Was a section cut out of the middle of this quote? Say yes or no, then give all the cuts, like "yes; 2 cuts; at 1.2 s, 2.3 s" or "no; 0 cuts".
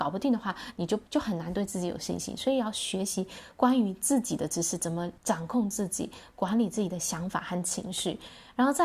yes; 2 cuts; at 1.1 s, 5.2 s